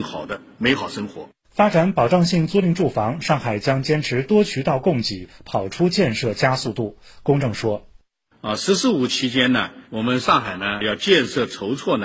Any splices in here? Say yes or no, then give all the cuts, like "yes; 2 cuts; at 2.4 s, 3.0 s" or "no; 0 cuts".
yes; 2 cuts; at 1.4 s, 9.8 s